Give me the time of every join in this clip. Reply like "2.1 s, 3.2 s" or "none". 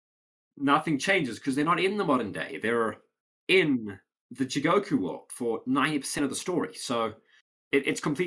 none